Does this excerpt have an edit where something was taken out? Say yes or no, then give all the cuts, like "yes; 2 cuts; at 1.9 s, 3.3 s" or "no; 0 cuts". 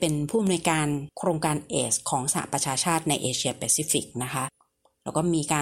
no; 0 cuts